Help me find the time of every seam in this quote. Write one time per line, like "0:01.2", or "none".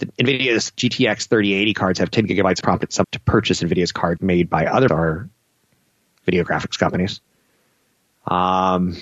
0:02.6
0:03.0
0:04.2
0:04.9